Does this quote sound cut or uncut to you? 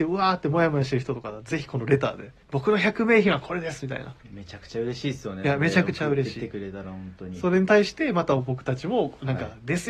cut